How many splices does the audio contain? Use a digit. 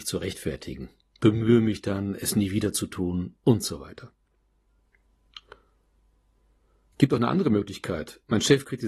0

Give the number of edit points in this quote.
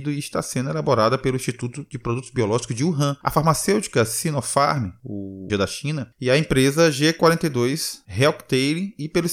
1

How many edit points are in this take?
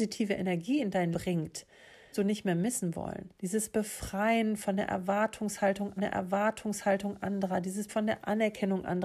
5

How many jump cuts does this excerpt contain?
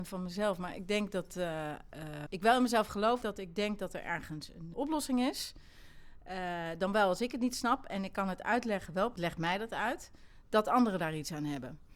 4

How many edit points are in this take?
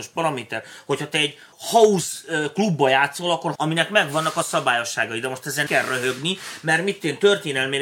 3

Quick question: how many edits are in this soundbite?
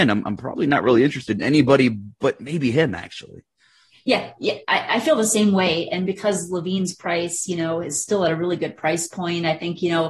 0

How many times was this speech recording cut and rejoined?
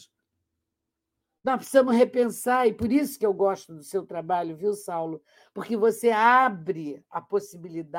0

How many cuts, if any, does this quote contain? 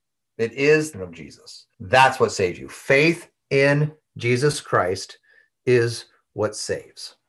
2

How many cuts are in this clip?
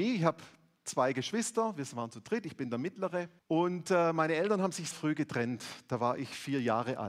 2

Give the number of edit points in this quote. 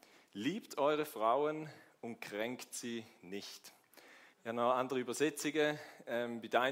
1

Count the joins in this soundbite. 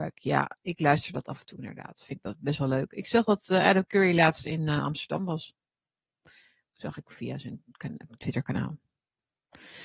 0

